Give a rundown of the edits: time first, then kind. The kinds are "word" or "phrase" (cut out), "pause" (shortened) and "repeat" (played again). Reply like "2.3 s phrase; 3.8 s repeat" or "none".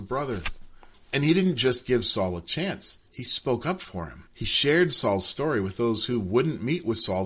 0.9 s pause; 4.3 s pause